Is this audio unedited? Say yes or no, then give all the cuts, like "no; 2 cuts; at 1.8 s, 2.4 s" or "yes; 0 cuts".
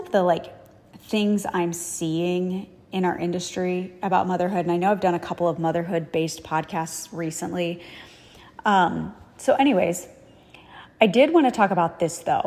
yes; 0 cuts